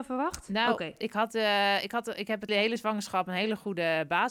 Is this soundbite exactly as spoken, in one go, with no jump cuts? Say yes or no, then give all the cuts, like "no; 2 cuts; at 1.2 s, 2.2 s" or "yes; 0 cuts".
no; 1 cut; at 2.5 s